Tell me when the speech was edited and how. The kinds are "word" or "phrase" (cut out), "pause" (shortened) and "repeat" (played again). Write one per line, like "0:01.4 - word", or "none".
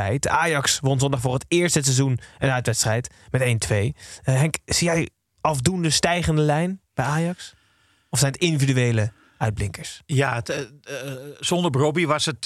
0:06.8 - pause